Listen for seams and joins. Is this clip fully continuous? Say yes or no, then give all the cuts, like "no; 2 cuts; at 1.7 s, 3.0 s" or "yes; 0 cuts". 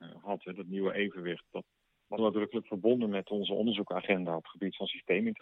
no; 2 cuts; at 1.4 s, 2.2 s